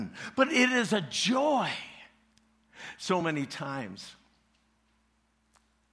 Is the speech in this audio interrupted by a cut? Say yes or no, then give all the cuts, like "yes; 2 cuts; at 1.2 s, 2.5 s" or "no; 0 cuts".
no; 0 cuts